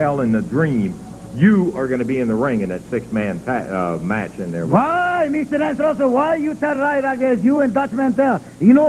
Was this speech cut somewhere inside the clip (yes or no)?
no